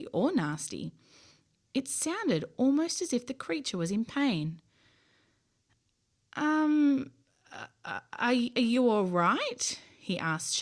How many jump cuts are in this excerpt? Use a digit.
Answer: 0